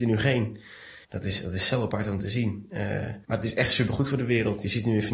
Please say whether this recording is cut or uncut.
cut